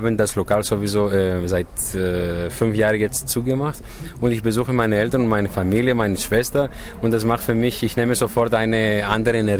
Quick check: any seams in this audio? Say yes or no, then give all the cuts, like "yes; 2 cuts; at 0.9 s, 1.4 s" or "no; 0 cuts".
no; 0 cuts